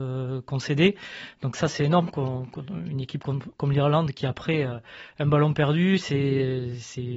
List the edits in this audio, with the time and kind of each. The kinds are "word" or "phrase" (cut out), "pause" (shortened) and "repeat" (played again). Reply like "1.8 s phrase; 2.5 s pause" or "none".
none